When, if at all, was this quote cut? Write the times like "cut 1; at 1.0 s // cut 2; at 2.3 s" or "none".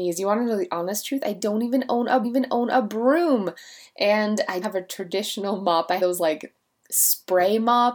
cut 1; at 2.2 s // cut 2; at 4.6 s // cut 3; at 6.0 s